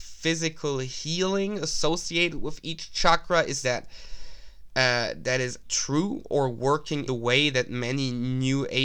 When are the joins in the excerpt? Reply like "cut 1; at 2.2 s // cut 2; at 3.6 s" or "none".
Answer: cut 1; at 3.6 s // cut 2; at 5.6 s // cut 3; at 7.1 s